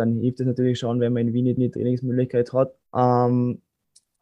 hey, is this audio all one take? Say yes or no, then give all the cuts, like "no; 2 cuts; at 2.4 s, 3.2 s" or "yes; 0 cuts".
no; 2 cuts; at 1.6 s, 2.9 s